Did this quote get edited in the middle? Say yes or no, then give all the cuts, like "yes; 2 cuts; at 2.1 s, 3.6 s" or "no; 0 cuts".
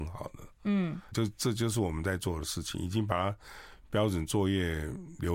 yes; 1 cut; at 1.1 s